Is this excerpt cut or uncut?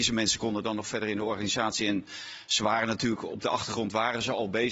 uncut